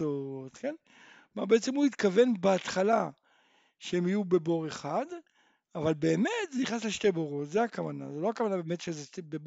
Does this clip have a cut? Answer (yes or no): no